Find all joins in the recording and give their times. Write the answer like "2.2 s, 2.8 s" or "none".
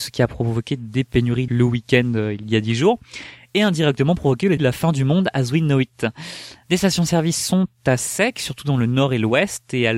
1.5 s, 4.6 s